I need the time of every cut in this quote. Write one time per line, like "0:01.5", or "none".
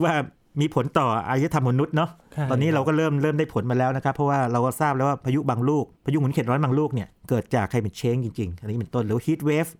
0:07.2